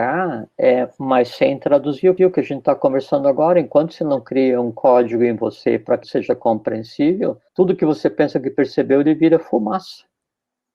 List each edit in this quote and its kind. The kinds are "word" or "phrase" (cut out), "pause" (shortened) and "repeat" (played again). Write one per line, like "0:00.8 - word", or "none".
0:02.2 - repeat
0:06.0 - word
0:07.5 - pause